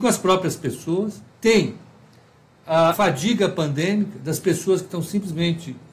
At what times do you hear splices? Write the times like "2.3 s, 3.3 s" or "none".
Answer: 1.3 s, 2.9 s